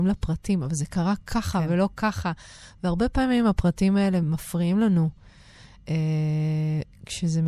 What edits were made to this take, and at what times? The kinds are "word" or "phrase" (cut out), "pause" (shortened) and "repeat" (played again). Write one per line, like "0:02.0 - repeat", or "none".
none